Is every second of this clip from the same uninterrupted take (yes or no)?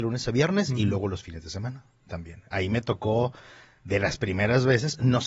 yes